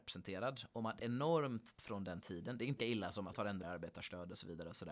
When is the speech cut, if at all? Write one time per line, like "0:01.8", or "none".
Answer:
0:01.0
0:01.8
0:02.8
0:03.3
0:03.6